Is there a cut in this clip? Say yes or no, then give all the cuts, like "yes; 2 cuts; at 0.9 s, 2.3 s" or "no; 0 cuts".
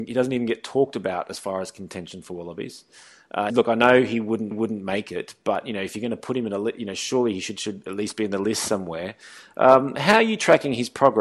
yes; 2 cuts; at 3.5 s, 4.5 s